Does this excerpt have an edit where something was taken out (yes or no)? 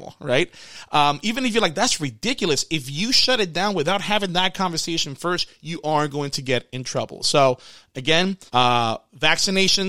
yes